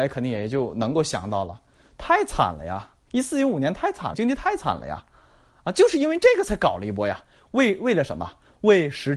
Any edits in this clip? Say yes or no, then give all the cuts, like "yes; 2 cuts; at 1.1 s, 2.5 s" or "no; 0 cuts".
yes; 1 cut; at 4.1 s